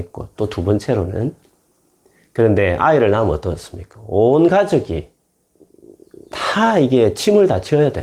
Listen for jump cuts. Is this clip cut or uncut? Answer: uncut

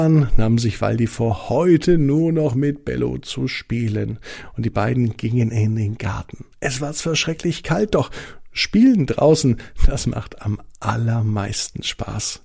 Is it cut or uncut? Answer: uncut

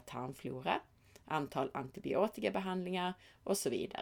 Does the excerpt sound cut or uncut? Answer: uncut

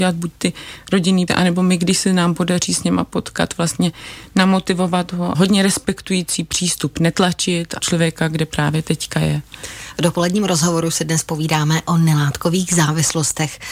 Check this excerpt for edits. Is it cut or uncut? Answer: cut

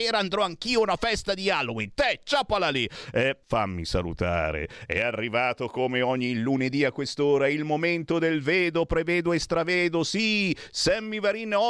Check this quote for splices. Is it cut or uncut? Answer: cut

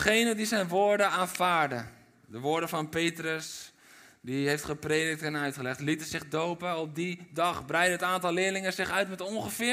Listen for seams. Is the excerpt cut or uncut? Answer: uncut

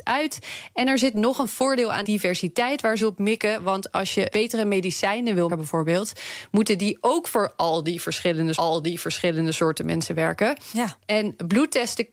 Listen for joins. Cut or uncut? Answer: cut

